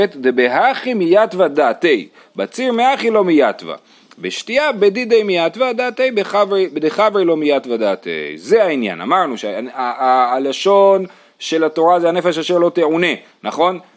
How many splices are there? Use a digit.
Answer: 0